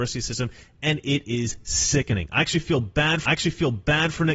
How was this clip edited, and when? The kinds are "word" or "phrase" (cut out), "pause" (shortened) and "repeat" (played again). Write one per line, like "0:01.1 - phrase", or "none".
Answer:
0:03.2 - repeat